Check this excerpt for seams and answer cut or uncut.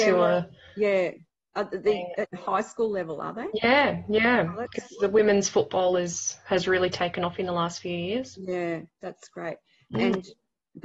uncut